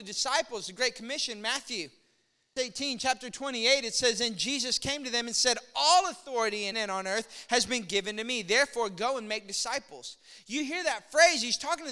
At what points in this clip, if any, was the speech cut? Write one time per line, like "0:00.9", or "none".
0:02.6
0:06.7